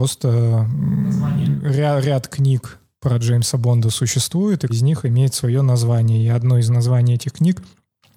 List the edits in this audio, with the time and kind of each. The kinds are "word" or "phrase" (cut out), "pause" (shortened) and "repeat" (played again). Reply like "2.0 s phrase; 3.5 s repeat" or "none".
4.7 s word